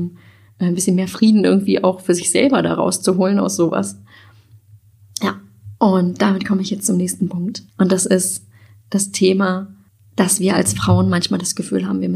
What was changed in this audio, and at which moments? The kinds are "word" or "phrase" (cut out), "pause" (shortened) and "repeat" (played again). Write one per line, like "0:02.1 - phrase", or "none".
0:07.7 - pause
0:09.9 - pause